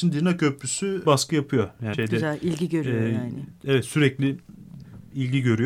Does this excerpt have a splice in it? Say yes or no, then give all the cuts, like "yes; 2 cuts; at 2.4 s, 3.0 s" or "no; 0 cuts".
yes; 2 cuts; at 1.0 s, 1.9 s